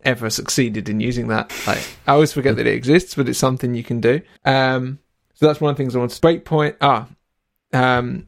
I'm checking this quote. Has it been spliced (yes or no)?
yes